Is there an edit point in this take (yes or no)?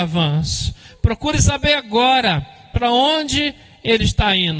no